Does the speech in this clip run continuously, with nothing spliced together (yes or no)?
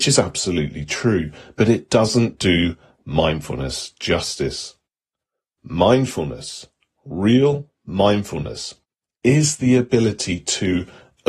yes